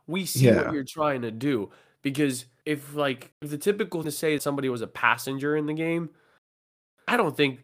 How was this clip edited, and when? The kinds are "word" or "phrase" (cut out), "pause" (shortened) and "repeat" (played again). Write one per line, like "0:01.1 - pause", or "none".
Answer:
0:02.6 - word
0:03.3 - pause
0:04.0 - word
0:04.4 - word